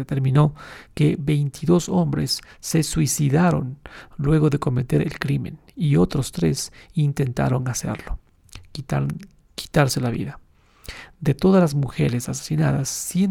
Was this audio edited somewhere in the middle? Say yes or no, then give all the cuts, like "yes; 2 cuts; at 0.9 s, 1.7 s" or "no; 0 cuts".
no; 0 cuts